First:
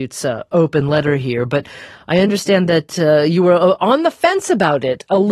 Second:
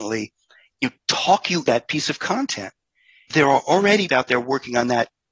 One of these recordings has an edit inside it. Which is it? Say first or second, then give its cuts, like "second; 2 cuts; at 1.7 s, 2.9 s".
second; 3 cuts; at 1.7 s, 3.3 s, 4.1 s